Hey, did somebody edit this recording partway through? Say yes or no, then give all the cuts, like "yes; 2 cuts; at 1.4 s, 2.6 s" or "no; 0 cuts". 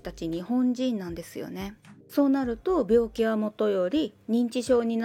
yes; 1 cut; at 2.0 s